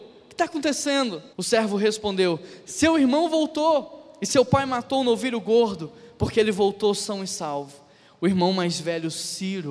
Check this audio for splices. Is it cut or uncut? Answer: cut